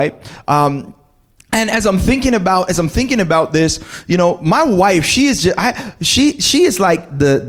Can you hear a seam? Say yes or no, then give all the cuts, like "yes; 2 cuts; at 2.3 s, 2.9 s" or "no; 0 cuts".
no; 0 cuts